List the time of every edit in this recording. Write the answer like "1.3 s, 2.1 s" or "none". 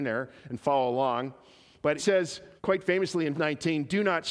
2.0 s, 2.6 s, 3.3 s